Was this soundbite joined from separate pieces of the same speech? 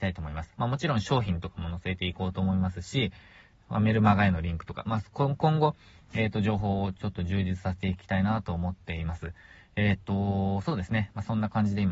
no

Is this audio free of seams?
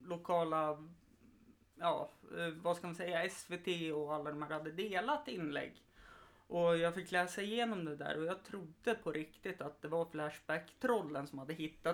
yes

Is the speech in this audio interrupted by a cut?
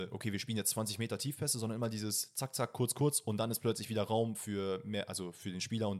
no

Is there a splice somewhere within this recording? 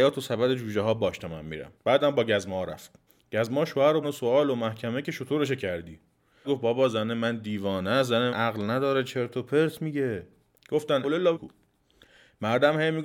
yes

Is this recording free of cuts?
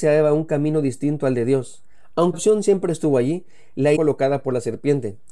no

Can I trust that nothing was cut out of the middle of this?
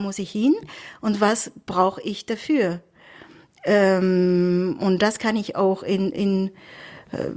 yes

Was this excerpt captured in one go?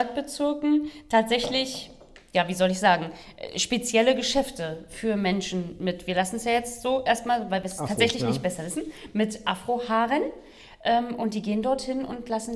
yes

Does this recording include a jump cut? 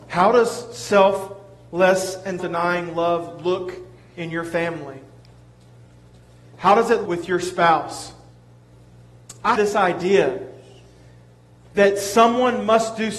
yes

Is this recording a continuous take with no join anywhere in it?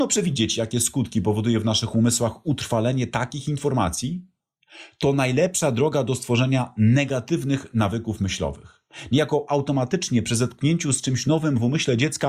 yes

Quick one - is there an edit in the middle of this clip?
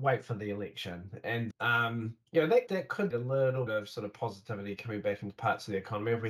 yes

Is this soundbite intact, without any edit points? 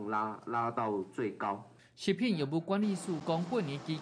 yes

